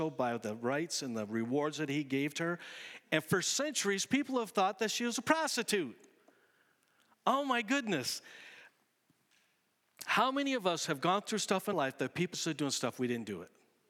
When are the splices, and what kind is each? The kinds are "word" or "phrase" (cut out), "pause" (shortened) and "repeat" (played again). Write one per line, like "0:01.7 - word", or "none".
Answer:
0:11.7 - word
0:12.3 - word

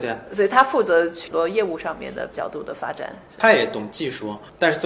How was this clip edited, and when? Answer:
0:02.3 - word

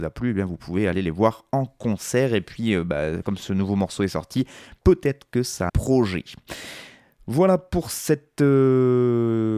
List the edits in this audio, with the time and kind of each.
0:05.7 - phrase

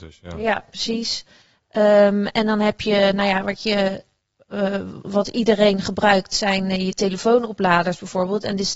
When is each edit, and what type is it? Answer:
0:05.0 - word

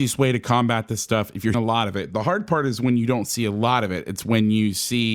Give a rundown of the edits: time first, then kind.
0:01.5 - word

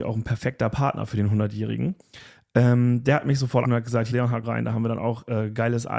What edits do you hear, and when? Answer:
0:03.6 - word
0:04.1 - word
0:04.4 - word

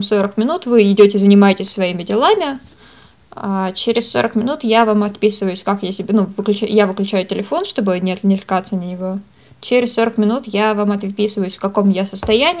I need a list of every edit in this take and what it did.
none

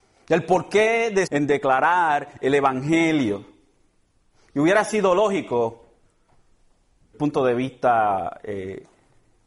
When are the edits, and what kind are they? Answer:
0:01.3 - phrase
0:07.1 - word

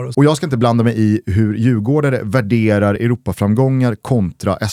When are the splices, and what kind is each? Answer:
none

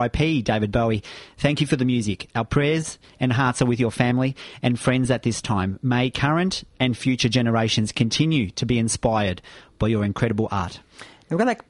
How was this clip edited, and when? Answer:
none

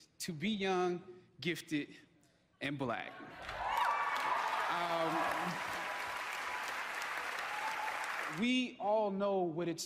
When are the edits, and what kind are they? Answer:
none

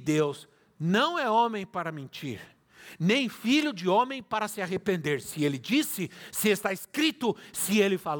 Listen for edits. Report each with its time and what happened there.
none

